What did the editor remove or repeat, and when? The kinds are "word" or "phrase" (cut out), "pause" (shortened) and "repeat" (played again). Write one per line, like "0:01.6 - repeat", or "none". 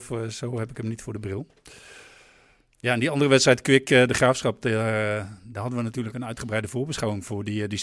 none